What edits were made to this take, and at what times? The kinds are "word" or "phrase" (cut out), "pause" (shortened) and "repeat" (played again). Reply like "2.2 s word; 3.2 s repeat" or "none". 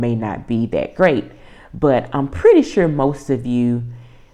none